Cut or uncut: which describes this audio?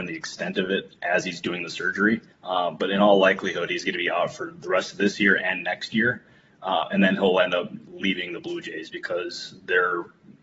cut